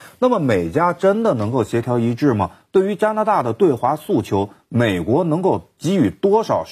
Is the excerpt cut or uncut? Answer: uncut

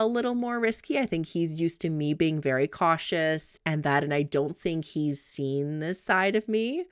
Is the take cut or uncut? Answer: cut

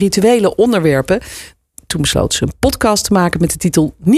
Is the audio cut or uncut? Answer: uncut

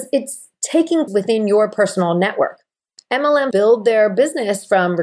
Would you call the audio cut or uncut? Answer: cut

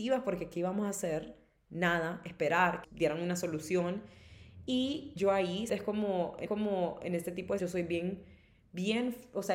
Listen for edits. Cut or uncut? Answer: cut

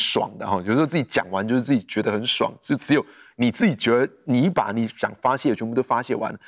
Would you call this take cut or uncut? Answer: uncut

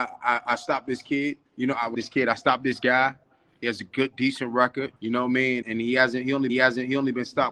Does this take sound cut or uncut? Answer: cut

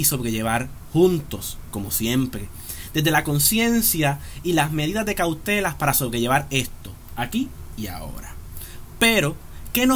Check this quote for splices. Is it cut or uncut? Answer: uncut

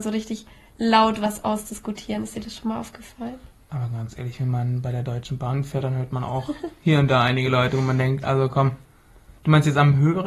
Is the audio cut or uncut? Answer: cut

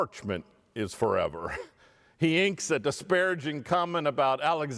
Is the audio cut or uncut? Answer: uncut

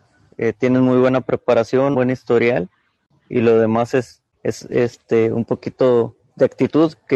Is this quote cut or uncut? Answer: cut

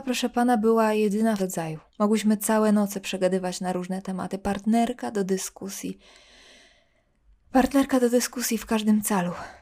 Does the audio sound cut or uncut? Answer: cut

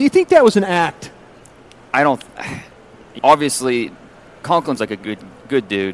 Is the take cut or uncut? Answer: cut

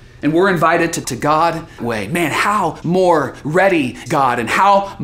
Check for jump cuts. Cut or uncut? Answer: cut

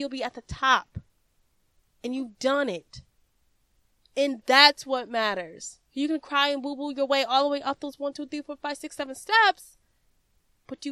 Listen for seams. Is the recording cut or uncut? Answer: cut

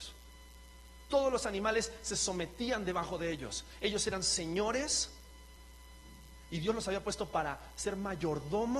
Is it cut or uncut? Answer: uncut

